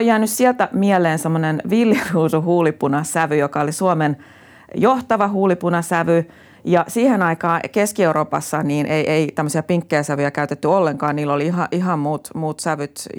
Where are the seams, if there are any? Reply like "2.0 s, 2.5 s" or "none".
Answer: none